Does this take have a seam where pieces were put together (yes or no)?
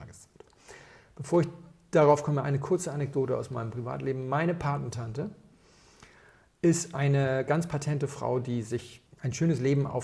no